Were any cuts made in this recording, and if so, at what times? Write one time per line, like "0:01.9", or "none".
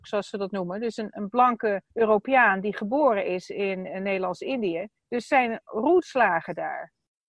0:01.9
0:05.0